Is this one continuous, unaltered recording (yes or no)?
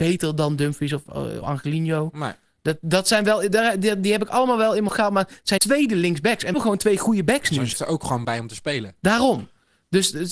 no